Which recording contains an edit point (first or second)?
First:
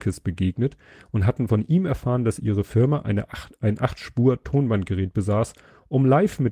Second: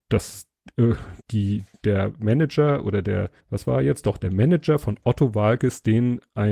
second